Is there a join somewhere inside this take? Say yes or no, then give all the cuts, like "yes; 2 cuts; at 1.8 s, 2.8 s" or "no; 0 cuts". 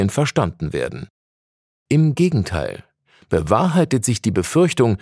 no; 0 cuts